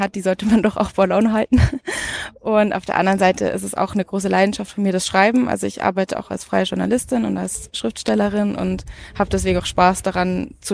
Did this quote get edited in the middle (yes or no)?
yes